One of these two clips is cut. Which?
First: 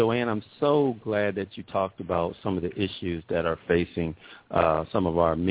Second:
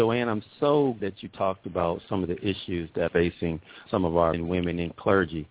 second; 4 cuts; at 1.0 s, 3.1 s, 3.9 s, 4.3 s

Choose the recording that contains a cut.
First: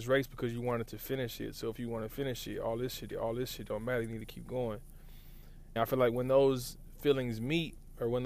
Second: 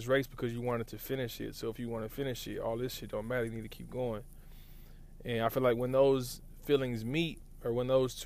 first; 2 cuts; at 3.1 s, 5.8 s

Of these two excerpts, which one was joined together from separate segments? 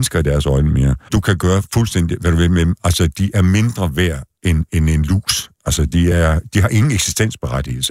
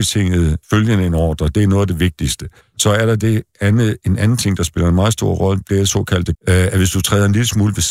second; 1 cut; at 6.3 s

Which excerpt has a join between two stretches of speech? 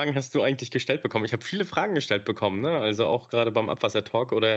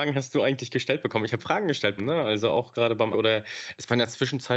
second; 3 cuts; at 1.4 s, 2.0 s, 3.1 s

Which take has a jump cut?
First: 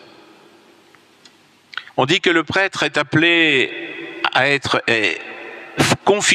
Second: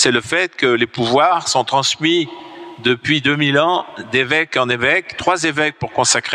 first; 1 cut; at 1.9 s

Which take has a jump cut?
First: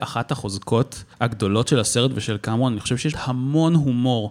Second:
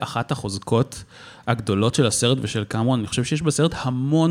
first; 2 cuts; at 1.1 s, 3.1 s

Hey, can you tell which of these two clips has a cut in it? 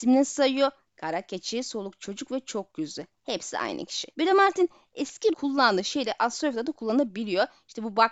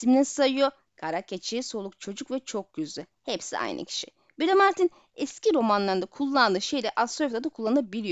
first; 2 cuts; at 4.1 s, 5.3 s

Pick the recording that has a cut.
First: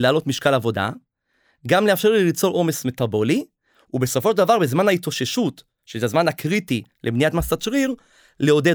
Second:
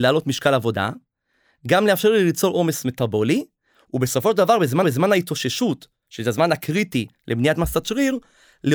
second; 1 cut; at 4.8 s

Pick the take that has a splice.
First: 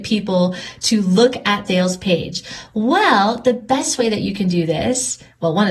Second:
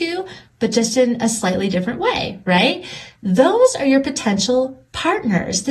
first; 1 cut; at 1.7 s

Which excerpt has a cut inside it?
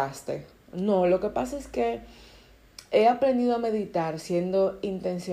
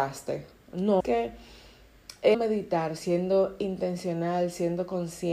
second; 2 cuts; at 1.0 s, 2.3 s

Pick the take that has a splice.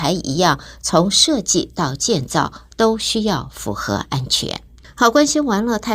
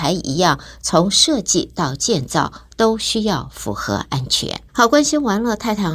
second; 1 cut; at 4.7 s

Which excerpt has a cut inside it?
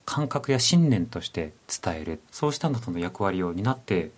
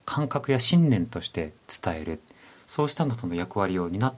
first; 1 cut; at 2.3 s

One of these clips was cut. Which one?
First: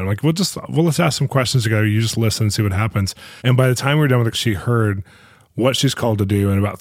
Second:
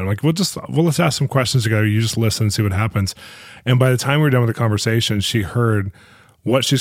first; 2 cuts; at 3.4 s, 4.3 s

